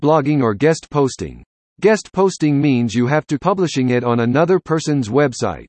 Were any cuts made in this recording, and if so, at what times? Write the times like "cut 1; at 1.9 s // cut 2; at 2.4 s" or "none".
cut 1; at 3.4 s